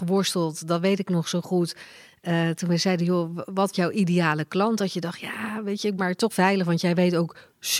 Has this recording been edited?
yes; 3 cuts; at 3.7 s, 6.0 s, 6.3 s

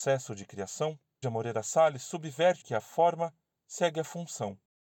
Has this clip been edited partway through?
yes; 2 cuts; at 1.2 s, 2.6 s

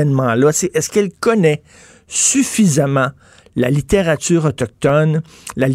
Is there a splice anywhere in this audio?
no; 0 cuts

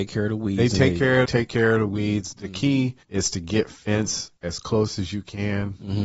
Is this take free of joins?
no; 3 cuts; at 1.3 s, 3.0 s, 4.4 s

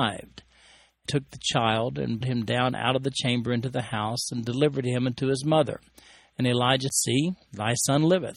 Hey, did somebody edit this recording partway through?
yes; 3 cuts; at 1.1 s, 2.2 s, 6.9 s

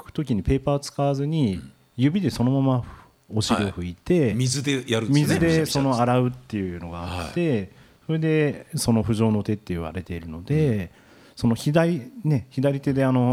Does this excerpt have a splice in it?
no; 0 cuts

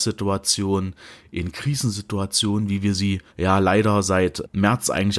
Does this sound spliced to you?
yes; 1 cut; at 3.3 s

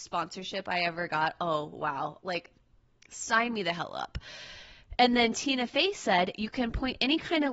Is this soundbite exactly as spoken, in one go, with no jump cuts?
yes; 0 cuts

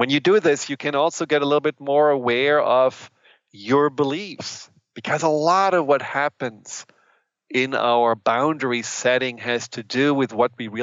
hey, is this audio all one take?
yes; 0 cuts

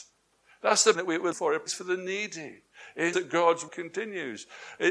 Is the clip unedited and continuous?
no; 5 cuts; at 0.9 s, 1.3 s, 1.7 s, 3.1 s, 3.7 s

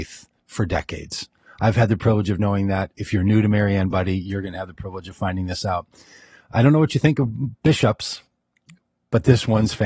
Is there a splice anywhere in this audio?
no; 0 cuts

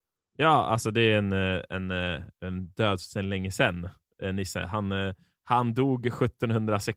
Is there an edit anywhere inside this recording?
no; 0 cuts

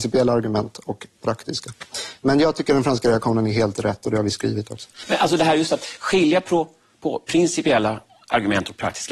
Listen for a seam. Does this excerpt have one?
no; 0 cuts

